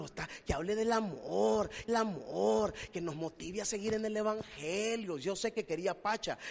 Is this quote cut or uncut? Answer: cut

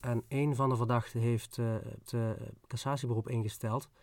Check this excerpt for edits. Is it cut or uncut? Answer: cut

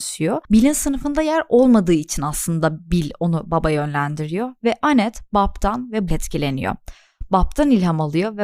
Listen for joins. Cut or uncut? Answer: cut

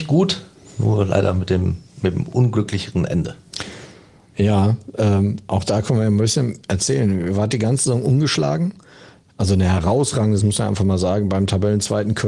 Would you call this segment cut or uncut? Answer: cut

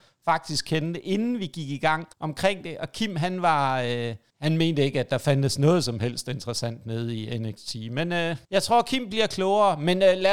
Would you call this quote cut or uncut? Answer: cut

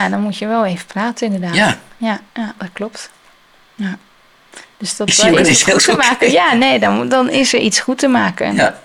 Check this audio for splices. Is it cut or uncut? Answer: cut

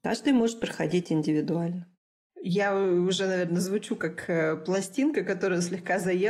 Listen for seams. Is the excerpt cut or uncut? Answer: uncut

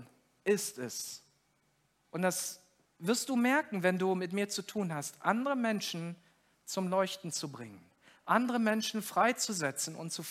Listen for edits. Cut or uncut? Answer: uncut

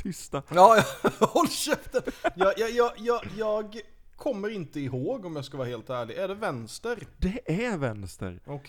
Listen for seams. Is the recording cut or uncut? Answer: uncut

